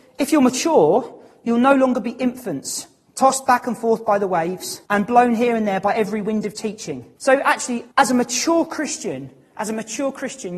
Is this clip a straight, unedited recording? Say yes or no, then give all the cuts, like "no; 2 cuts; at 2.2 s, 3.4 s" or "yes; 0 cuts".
no; 3 cuts; at 4.9 s, 7.2 s, 7.9 s